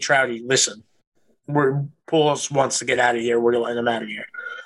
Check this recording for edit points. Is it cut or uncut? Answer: uncut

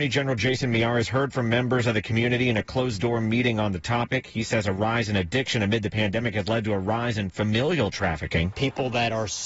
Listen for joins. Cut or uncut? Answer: uncut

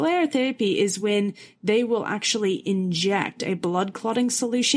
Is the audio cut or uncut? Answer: uncut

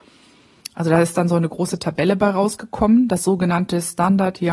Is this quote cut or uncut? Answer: uncut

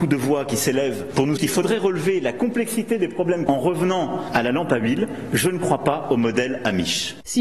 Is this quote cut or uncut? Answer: cut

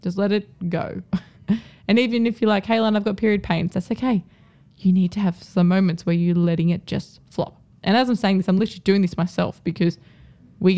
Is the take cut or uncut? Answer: uncut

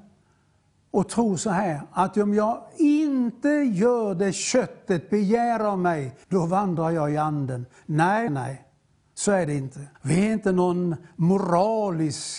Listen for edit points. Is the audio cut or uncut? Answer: cut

